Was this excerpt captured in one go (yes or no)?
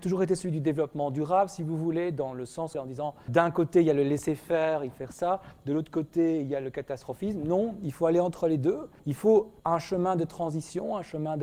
no